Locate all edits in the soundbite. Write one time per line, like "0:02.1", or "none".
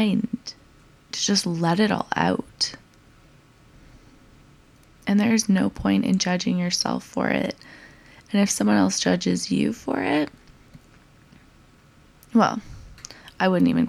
none